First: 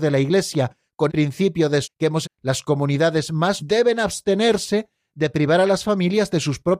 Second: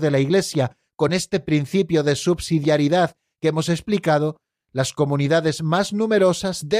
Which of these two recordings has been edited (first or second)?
first